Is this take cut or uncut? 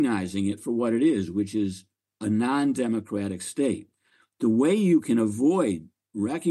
uncut